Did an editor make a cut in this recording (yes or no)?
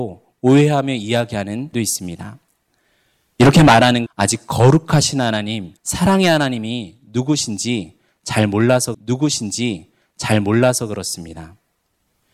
yes